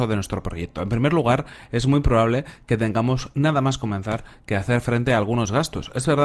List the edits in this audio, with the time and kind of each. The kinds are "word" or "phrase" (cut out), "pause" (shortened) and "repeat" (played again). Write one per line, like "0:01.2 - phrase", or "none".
none